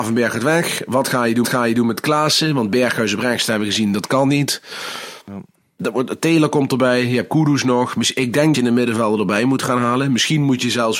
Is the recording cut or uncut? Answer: cut